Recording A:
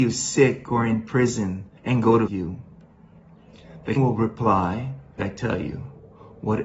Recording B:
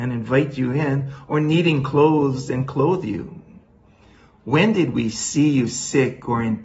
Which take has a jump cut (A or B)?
A